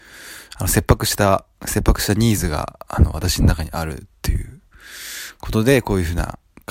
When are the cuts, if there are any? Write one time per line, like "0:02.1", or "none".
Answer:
none